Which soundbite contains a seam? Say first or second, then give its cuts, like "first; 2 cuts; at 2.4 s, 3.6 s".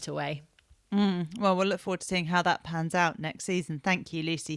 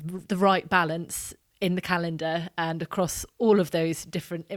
second; 1 cut; at 1.4 s